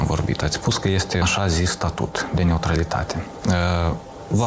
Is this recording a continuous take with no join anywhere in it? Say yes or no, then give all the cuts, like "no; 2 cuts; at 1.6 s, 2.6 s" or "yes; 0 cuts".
no; 1 cut; at 1.2 s